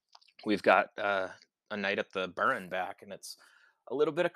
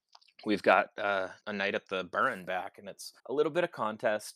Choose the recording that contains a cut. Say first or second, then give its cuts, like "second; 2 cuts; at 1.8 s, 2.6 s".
second; 2 cuts; at 1.4 s, 3.2 s